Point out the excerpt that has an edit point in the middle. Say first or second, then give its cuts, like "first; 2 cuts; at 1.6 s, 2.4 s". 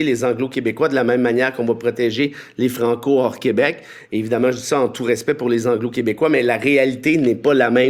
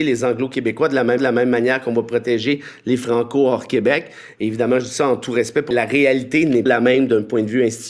second; 3 cuts; at 1.2 s, 5.7 s, 6.7 s